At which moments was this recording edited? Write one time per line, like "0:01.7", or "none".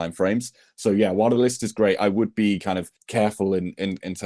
0:03.0